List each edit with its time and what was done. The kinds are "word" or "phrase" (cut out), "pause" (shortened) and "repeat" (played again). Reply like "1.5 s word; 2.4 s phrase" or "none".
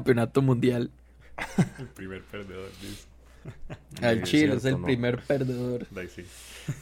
none